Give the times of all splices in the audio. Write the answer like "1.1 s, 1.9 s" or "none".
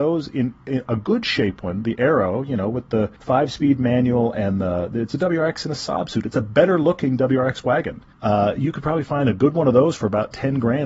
3.2 s, 8.1 s